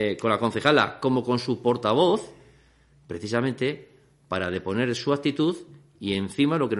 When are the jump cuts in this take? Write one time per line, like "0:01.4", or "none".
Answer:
none